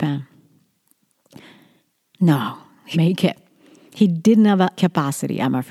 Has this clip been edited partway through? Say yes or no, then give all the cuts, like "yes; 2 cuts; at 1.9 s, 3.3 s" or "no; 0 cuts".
yes; 2 cuts; at 2.9 s, 4.7 s